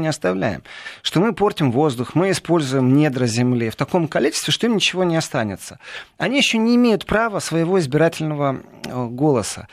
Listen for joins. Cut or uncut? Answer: uncut